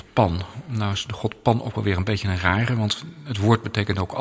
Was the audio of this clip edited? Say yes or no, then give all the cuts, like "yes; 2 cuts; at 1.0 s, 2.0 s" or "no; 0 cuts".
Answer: no; 0 cuts